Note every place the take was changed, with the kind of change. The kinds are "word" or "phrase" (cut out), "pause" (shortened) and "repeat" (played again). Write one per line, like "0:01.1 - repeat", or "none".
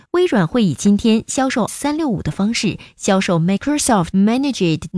0:01.7 - word